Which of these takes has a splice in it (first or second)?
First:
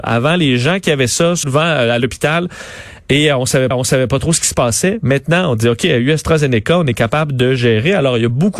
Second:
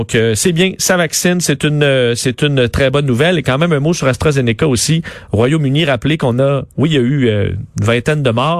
first